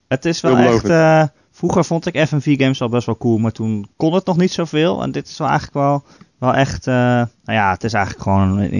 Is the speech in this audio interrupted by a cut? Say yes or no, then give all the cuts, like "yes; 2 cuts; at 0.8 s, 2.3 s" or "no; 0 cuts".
yes; 3 cuts; at 3.9 s, 6.2 s, 7.4 s